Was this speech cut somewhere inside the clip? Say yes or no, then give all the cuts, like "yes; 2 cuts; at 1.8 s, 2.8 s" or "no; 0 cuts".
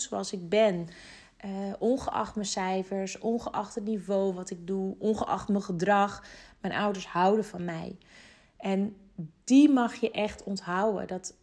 no; 0 cuts